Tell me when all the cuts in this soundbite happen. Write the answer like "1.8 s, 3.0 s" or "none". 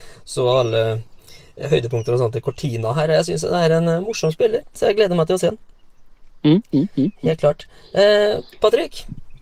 none